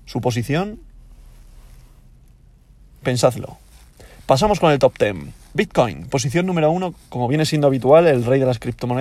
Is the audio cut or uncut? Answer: uncut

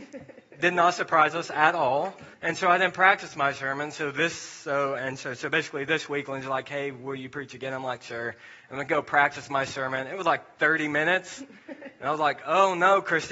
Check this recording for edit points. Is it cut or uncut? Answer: cut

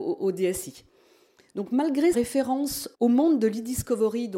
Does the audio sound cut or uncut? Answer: cut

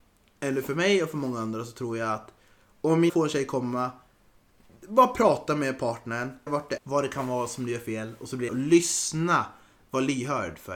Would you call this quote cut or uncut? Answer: cut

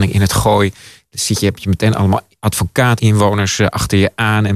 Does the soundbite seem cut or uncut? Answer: cut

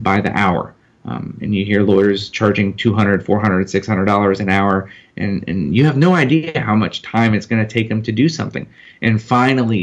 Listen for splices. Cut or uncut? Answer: uncut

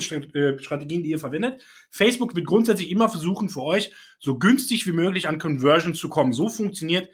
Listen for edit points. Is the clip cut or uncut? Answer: uncut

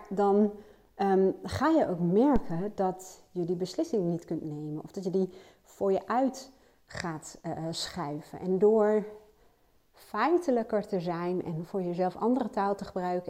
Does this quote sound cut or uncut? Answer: uncut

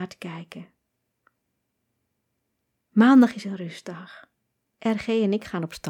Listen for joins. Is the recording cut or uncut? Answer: uncut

